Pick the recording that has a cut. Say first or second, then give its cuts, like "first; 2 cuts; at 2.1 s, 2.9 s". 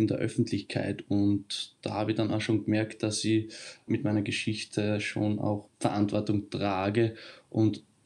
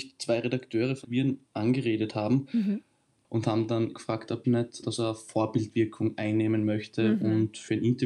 second; 5 cuts; at 1.0 s, 1.4 s, 3.9 s, 4.4 s, 4.8 s